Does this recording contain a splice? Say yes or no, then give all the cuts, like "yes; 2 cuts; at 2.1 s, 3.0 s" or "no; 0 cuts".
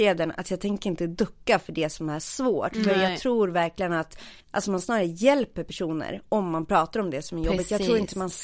yes; 1 cut; at 4.4 s